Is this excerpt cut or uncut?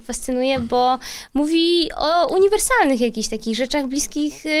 uncut